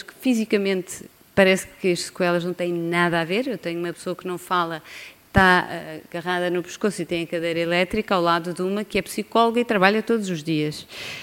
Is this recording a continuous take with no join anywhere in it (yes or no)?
yes